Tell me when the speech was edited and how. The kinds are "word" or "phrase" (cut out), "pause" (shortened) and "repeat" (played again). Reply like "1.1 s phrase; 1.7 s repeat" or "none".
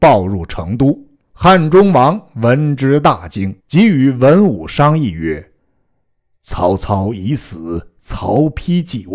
1.1 s pause; 3.6 s pause; 5.6 s pause